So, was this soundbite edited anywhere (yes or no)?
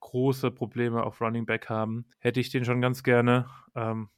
yes